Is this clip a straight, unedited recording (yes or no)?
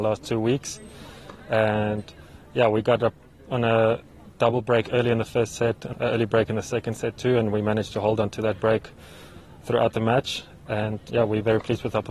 no